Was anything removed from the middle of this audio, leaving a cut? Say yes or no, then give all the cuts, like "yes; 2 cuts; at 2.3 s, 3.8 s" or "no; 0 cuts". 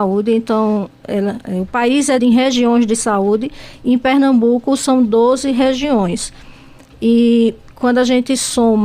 yes; 1 cut; at 2.2 s